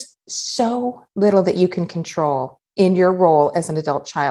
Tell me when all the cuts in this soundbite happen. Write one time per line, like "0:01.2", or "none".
none

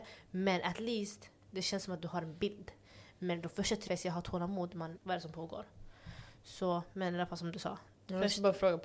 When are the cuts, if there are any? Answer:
0:03.9
0:05.0

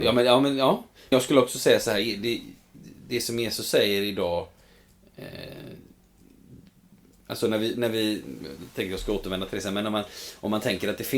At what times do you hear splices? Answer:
0:01.1

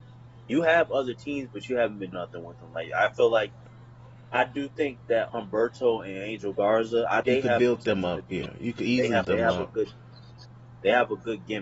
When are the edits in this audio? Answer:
0:02.1
0:05.3
0:07.2
0:09.2

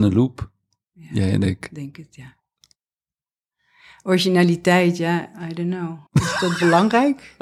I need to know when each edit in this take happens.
0:06.1

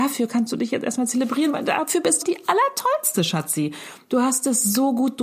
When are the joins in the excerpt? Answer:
0:02.2

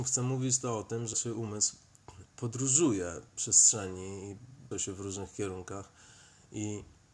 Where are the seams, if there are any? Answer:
0:01.1
0:03.3
0:04.7

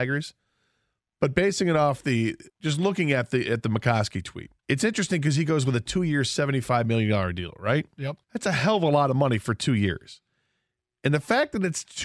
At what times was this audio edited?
0:02.5
0:04.6
0:08.2

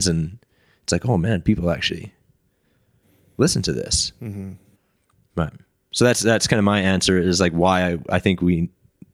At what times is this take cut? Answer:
none

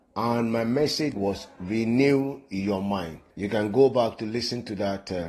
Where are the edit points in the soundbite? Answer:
0:01.2
0:03.3

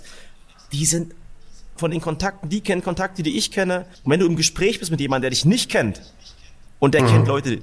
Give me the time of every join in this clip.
0:01.8
0:03.9

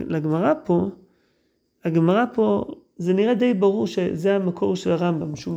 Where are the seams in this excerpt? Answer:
none

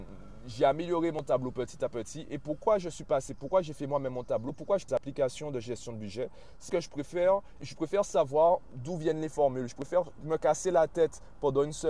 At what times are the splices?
0:04.9
0:06.7
0:07.6

